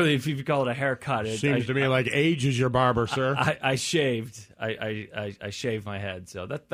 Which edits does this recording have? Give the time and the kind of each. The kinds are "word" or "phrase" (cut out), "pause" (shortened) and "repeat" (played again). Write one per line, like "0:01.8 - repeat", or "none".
none